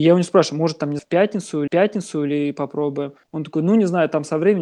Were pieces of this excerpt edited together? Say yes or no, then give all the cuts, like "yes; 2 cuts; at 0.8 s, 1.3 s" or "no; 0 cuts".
yes; 3 cuts; at 1.0 s, 1.7 s, 3.2 s